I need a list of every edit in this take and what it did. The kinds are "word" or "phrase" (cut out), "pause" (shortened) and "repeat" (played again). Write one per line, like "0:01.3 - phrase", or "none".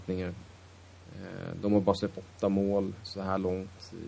0:02.1 - word